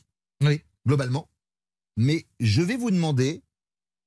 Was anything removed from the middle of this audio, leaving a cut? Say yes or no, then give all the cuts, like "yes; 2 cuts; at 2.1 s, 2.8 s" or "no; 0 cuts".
no; 0 cuts